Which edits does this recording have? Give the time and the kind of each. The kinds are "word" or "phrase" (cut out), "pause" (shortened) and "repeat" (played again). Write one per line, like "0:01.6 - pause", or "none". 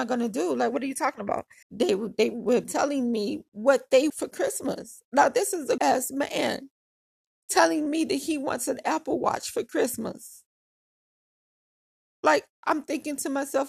0:01.6 - word
0:02.6 - word
0:04.1 - word
0:05.8 - word